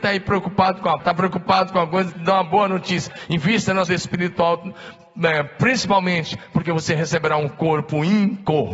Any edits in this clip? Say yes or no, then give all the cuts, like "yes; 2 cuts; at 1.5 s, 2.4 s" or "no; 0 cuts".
yes; 3 cuts; at 1.0 s, 2.1 s, 3.9 s